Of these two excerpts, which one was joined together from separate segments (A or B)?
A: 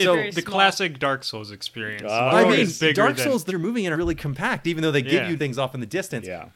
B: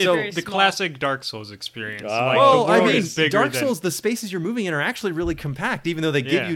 A